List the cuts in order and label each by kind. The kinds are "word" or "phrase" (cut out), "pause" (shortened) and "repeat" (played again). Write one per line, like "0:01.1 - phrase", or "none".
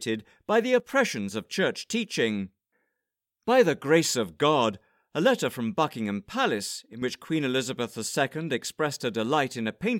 none